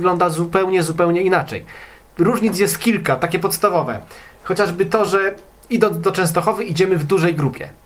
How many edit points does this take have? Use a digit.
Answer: 0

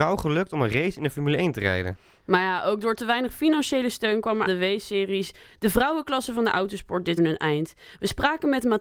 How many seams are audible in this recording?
2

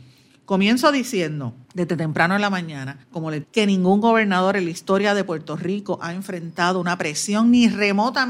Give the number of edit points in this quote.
3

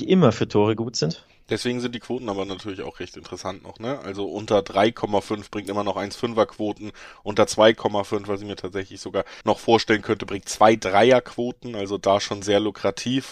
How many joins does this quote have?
1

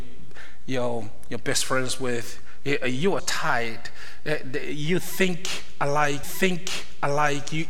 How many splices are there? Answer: 2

